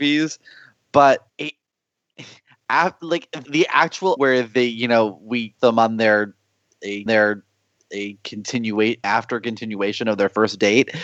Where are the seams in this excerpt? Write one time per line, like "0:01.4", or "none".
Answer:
0:01.3
0:03.4
0:04.2
0:05.6
0:07.1
0:09.0